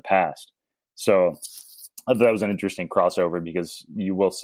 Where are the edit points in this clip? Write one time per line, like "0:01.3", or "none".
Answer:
none